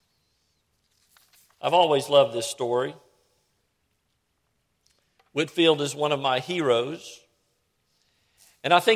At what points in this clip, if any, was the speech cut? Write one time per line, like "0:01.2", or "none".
none